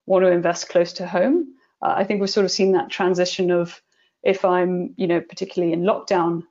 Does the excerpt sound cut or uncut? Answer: uncut